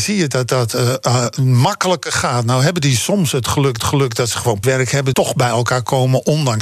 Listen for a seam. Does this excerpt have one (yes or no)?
yes